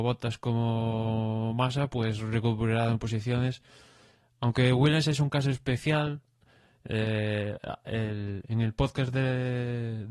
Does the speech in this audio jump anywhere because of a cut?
no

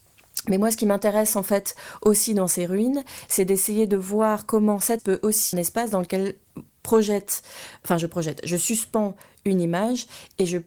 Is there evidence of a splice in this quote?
yes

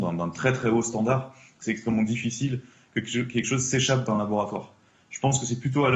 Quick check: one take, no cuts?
yes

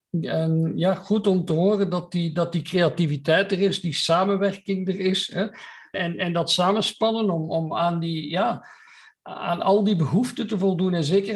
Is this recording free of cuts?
yes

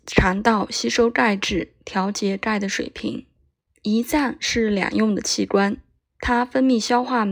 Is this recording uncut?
no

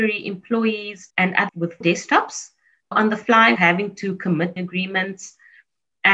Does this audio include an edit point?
yes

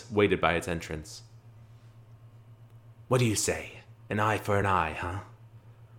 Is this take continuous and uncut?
yes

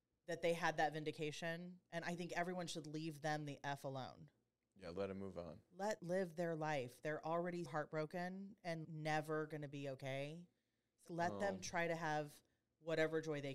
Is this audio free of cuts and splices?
no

